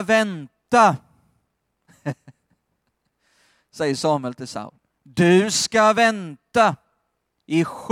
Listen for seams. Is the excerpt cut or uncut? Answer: uncut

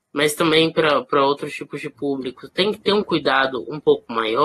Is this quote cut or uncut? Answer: uncut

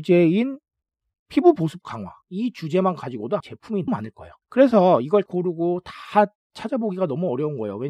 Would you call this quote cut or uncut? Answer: cut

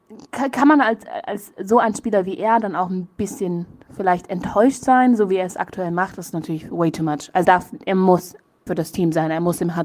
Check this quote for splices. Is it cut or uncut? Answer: cut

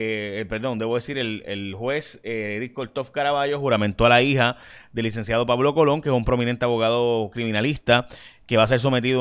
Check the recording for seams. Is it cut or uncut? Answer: uncut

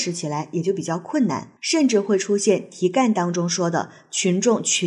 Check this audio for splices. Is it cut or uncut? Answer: cut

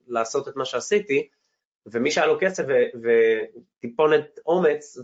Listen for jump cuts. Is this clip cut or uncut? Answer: uncut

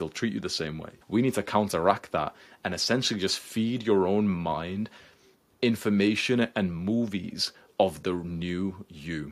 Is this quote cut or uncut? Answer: cut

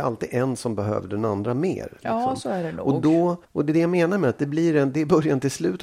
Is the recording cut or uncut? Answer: cut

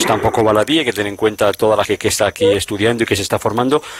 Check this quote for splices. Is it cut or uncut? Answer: cut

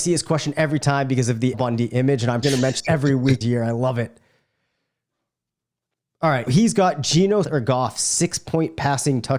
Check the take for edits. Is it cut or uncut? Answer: cut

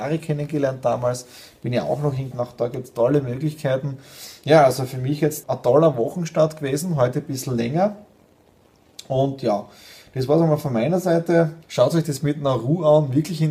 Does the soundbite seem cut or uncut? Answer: cut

